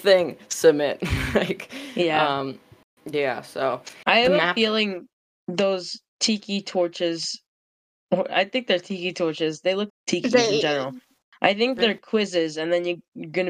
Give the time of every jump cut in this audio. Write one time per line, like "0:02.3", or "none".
0:09.9